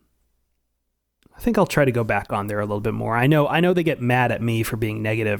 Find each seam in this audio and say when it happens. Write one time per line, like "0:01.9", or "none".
none